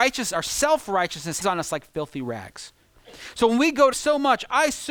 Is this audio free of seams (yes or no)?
no